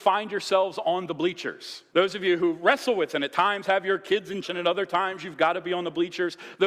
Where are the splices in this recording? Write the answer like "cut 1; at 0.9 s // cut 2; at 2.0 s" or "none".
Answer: cut 1; at 1.9 s // cut 2; at 3.1 s // cut 3; at 4.4 s